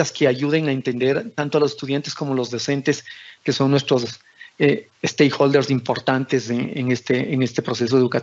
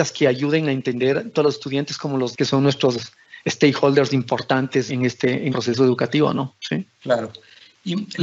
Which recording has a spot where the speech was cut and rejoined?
second; 5 cuts; at 1.3 s, 2.3 s, 3.4 s, 4.9 s, 5.5 s

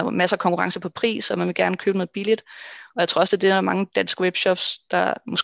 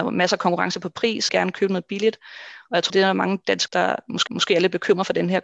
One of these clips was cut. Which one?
second; 4 cuts; at 1.3 s, 2.9 s, 3.7 s, 4.3 s

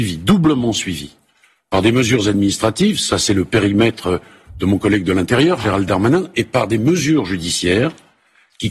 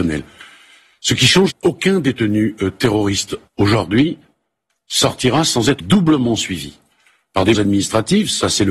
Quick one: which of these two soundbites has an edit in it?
second; 4 cuts; at 1.5 s, 3.5 s, 5.8 s, 7.5 s

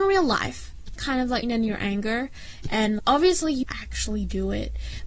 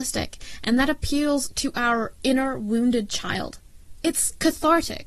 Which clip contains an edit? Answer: first; 4 cuts; at 1.0 s, 1.4 s, 3.0 s, 3.6 s

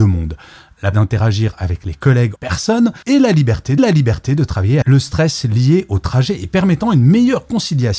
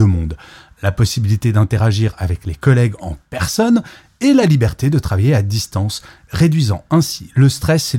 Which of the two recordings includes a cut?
first; 5 cuts; at 0.9 s, 2.4 s, 3.0 s, 3.8 s, 4.8 s

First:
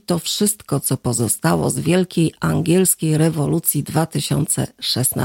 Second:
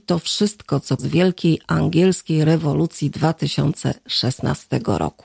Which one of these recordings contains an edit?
second; 1 cut; at 1.0 s

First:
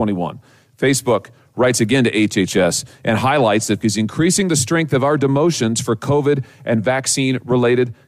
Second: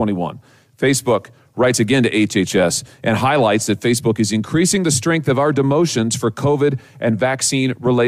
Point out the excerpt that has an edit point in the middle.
first; 1 cut; at 3.8 s

